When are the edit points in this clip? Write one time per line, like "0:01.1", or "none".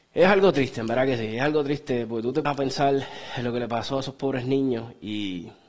0:02.5